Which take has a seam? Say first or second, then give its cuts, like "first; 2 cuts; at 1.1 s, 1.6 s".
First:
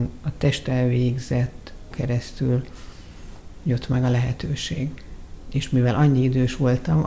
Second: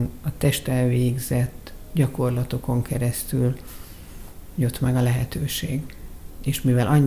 first; 1 cut; at 1.9 s